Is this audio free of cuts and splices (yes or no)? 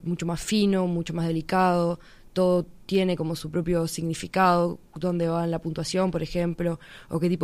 yes